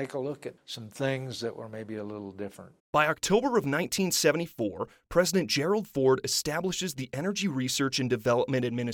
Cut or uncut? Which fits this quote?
cut